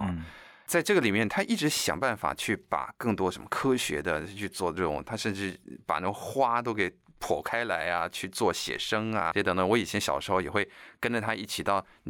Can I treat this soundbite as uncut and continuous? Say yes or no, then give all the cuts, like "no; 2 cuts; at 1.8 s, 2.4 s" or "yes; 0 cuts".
no; 1 cut; at 9.3 s